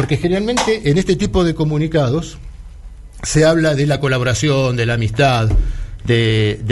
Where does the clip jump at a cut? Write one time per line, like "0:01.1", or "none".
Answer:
none